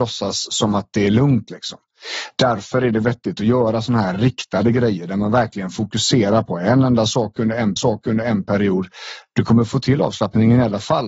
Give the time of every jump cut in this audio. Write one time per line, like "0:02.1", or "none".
0:07.8